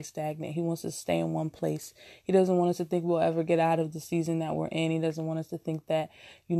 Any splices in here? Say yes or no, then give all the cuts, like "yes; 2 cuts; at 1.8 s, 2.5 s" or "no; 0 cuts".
no; 0 cuts